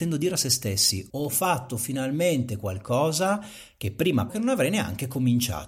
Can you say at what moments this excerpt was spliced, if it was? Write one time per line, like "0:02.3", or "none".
0:01.1
0:04.3